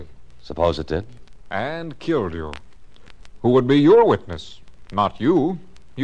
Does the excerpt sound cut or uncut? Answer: uncut